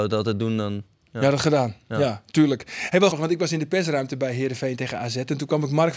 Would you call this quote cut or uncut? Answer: cut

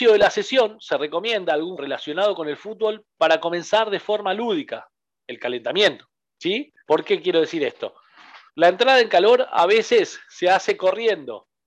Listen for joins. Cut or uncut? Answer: cut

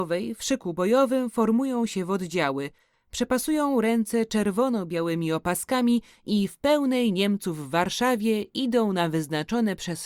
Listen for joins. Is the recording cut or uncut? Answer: uncut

